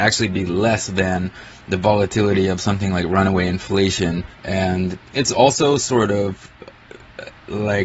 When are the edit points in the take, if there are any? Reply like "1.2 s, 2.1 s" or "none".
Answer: 4.3 s